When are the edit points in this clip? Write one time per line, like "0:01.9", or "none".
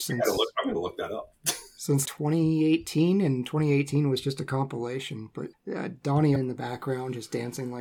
0:02.0
0:05.5
0:06.4